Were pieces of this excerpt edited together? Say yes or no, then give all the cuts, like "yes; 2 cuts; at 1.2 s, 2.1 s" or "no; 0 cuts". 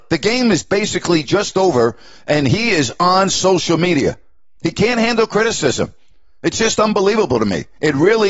no; 0 cuts